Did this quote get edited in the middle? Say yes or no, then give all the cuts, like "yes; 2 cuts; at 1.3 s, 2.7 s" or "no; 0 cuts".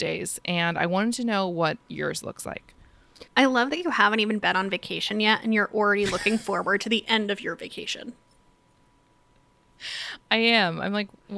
yes; 1 cut; at 3.3 s